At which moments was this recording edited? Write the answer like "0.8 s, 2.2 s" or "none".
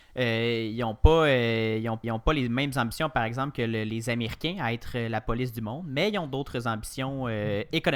2.0 s